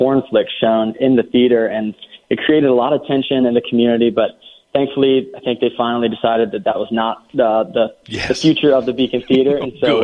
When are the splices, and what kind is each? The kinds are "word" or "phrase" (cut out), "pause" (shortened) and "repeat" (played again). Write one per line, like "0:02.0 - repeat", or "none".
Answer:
none

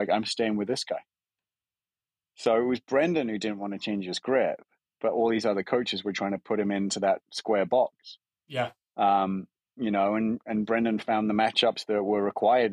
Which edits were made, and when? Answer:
none

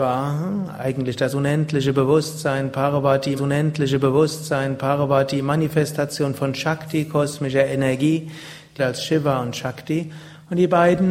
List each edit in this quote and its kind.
0:03.4 - repeat
0:08.8 - phrase

